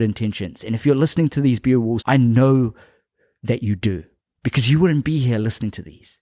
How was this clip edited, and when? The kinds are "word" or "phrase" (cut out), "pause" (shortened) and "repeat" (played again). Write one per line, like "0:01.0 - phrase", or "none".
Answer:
0:02.0 - word